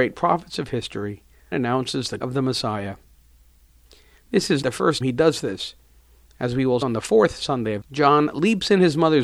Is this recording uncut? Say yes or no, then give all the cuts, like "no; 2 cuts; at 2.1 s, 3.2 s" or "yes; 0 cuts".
no; 6 cuts; at 1.5 s, 2.2 s, 4.6 s, 5.0 s, 6.8 s, 7.8 s